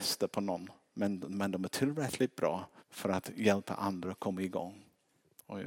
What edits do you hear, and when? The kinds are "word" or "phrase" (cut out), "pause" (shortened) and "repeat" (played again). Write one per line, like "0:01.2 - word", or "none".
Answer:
0:02.8 - pause

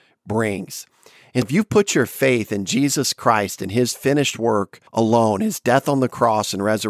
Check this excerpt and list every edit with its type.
0:01.4 - word
0:04.9 - pause

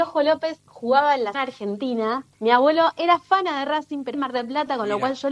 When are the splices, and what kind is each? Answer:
0:01.3 - word
0:02.3 - pause
0:04.1 - word

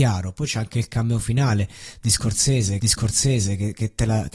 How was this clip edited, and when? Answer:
0:02.8 - repeat

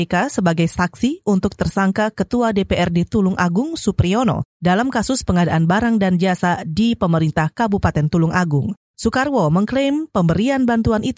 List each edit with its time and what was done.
none

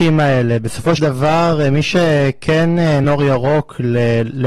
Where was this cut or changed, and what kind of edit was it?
0:01.0 - word
0:03.0 - word

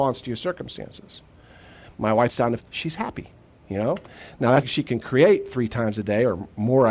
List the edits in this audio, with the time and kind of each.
0:02.3 - word
0:02.6 - word
0:04.6 - word

